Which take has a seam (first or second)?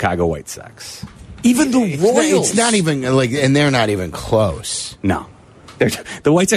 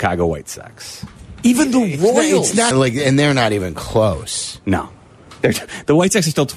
second